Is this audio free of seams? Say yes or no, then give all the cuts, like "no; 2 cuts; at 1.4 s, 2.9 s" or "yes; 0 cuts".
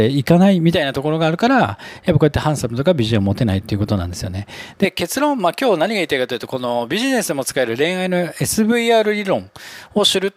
yes; 0 cuts